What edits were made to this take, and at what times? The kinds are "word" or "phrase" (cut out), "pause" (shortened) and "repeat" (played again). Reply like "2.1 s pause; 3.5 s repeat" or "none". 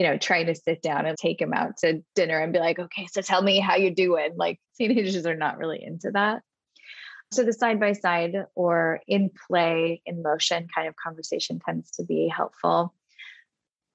1.1 s word; 4.6 s pause

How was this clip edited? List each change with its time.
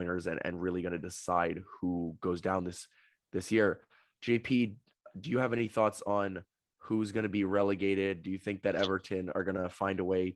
none

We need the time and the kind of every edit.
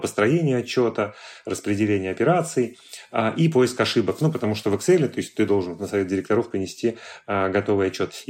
none

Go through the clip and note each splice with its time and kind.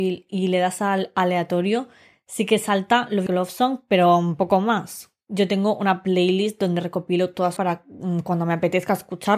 3.3 s word; 7.6 s word

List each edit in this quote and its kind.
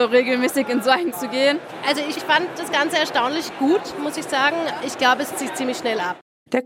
1.1 s word; 2.2 s word; 4.8 s word; 5.3 s word

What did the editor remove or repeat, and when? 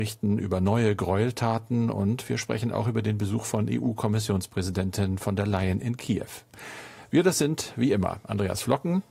none

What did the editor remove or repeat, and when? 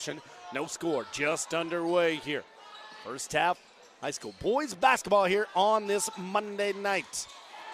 none

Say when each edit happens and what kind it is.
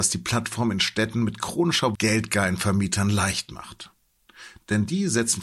1.9 s phrase

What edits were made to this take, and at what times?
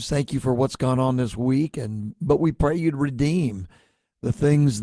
none

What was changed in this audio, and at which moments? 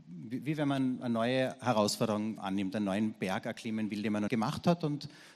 2.4 s word; 4.3 s word

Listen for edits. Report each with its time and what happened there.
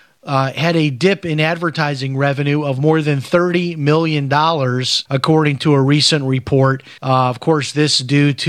5.1 s pause; 7.0 s pause

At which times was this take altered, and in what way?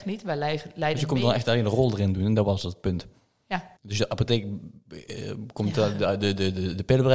3.8 s pause

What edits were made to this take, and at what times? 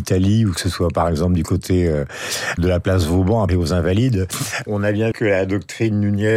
2.6 s word; 3.5 s word; 4.7 s word; 5.1 s word

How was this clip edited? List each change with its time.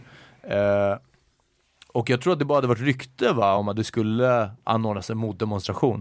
none

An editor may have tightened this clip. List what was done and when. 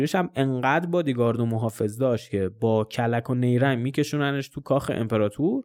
none

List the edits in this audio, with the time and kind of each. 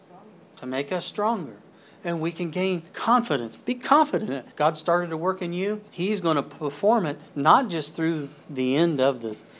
1.7 s pause; 2.9 s pause; 4.5 s pause; 5.9 s pause; 7.3 s pause; 8.4 s pause

